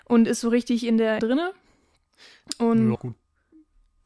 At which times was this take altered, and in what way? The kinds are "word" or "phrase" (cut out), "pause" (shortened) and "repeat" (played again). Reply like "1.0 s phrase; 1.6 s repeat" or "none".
1.2 s phrase; 2.9 s word